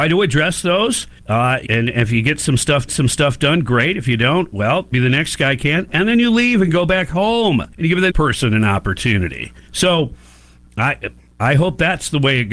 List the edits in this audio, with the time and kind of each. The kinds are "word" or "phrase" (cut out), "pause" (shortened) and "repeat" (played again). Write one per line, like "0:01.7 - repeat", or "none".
0:01.2 - pause
0:01.6 - word
0:02.9 - repeat
0:04.9 - word
0:07.7 - pause
0:08.1 - word
0:09.7 - pause
0:11.2 - pause